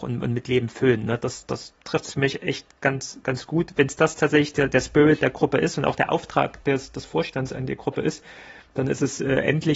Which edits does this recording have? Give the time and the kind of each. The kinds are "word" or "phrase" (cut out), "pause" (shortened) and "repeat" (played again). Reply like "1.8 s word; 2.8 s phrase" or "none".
none